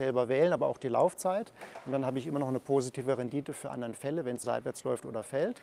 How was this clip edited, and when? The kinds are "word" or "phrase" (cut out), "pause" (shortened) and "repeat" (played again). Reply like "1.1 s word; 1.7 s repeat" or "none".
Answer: 3.7 s word; 4.4 s word